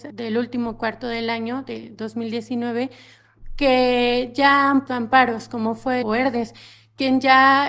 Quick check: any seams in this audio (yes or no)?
yes